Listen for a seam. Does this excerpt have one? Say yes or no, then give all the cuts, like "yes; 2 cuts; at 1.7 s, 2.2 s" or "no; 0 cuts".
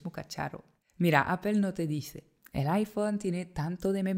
no; 0 cuts